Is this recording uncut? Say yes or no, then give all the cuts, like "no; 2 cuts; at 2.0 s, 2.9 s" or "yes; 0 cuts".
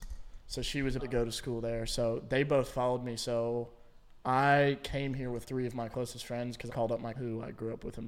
no; 4 cuts; at 1.0 s, 5.4 s, 6.7 s, 7.1 s